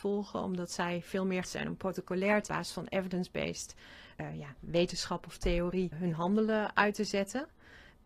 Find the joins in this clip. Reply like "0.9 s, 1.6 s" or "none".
1.4 s, 2.5 s, 4.2 s, 5.9 s

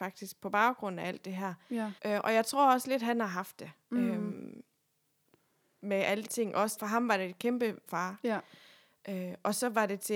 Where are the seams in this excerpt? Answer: 2.0 s, 6.3 s, 6.8 s, 7.9 s

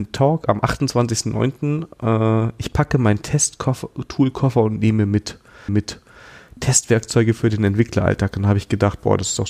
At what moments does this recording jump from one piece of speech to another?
5.7 s

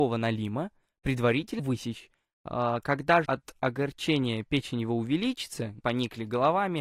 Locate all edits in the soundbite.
1.6 s, 3.2 s, 5.8 s

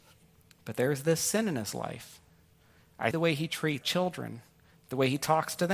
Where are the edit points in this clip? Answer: 3.1 s, 3.8 s

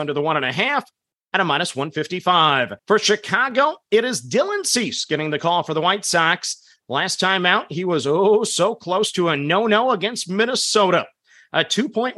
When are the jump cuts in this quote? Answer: 2.8 s

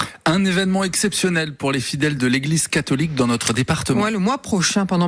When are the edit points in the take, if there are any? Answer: none

